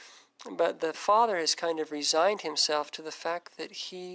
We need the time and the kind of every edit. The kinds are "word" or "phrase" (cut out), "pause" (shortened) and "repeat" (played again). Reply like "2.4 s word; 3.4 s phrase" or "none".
none